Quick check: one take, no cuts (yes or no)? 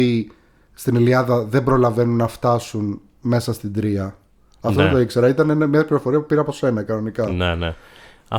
yes